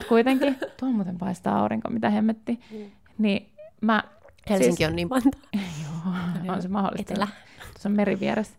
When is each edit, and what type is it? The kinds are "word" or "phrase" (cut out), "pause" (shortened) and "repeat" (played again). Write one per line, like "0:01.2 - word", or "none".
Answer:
0:02.6 - pause
0:05.1 - phrase